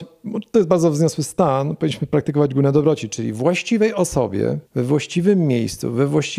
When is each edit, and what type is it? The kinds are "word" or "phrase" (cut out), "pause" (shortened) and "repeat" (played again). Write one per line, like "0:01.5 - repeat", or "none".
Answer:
0:04.7 - pause